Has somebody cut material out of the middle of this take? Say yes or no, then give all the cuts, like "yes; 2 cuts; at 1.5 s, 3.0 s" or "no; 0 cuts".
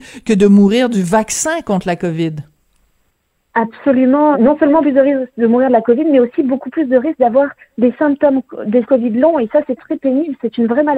yes; 4 cuts; at 4.3 s, 4.8 s, 8.9 s, 9.8 s